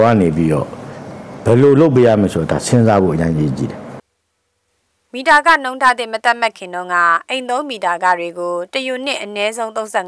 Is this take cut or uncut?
uncut